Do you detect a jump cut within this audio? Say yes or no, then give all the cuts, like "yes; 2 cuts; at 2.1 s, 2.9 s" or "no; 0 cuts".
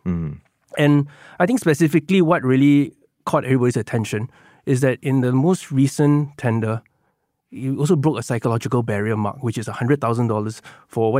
no; 0 cuts